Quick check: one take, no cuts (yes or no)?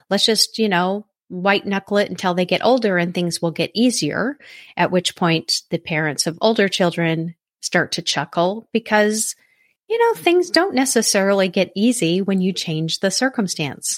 yes